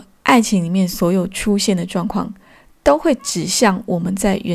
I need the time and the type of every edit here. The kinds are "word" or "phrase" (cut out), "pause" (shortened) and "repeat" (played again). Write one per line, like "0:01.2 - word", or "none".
none